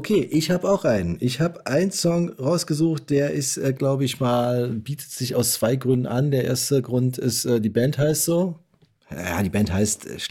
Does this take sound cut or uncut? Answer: uncut